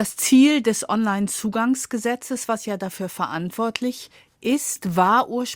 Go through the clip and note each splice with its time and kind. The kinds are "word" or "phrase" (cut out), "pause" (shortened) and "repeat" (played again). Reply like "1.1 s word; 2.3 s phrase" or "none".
none